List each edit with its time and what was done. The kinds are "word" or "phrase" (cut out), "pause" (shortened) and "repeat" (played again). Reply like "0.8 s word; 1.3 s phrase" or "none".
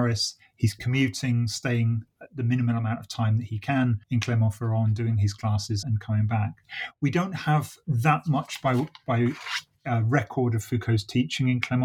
4.0 s pause; 5.8 s word